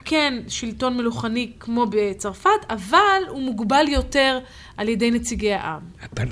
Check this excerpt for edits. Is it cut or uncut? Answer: uncut